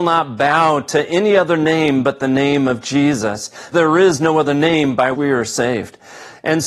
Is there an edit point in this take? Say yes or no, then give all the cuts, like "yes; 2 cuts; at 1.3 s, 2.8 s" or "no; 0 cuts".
yes; 2 cuts; at 3.7 s, 5.1 s